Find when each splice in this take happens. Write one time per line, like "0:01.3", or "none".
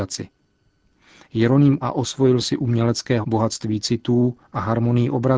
0:01.8
0:03.2